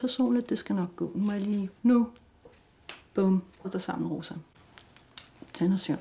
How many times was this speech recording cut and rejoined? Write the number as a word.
one